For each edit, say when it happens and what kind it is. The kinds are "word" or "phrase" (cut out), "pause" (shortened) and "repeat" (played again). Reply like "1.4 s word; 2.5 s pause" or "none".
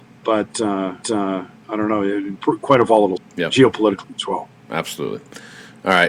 1.0 s repeat; 2.4 s word; 3.2 s word